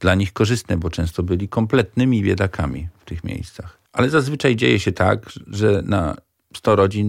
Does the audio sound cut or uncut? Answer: cut